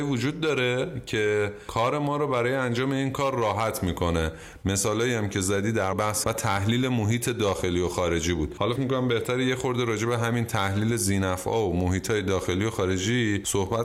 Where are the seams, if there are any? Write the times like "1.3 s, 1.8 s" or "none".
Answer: 5.9 s, 6.2 s, 8.8 s